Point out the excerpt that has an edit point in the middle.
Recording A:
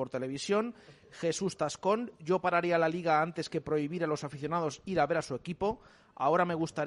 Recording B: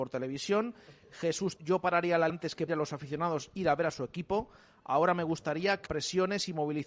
B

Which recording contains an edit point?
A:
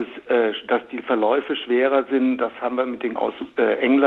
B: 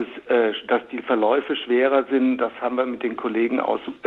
A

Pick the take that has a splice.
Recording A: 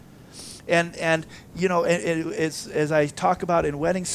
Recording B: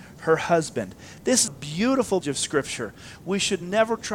B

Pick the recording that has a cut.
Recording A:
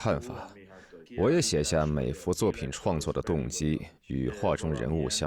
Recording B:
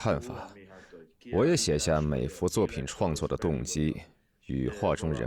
A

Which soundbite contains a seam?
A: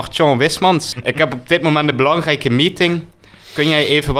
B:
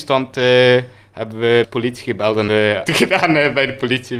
B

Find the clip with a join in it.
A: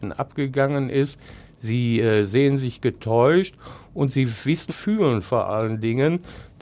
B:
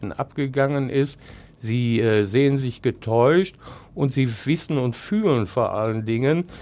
A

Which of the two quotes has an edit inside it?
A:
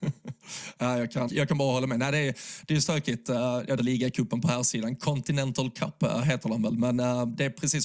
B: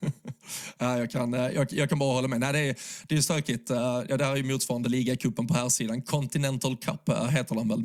A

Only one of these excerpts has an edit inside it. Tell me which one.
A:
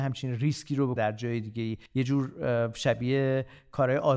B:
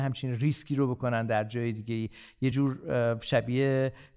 A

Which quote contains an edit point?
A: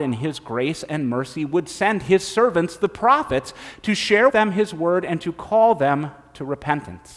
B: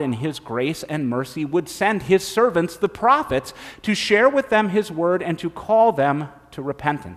A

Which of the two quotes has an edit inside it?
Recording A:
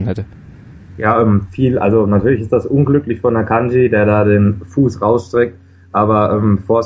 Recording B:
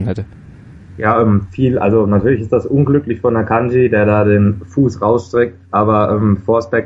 B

